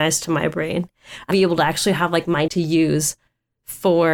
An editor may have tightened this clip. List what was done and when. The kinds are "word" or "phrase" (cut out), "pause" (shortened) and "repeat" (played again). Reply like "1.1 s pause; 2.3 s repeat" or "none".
1.3 s word; 2.5 s word